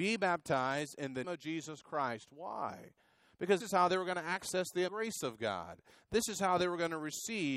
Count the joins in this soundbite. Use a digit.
3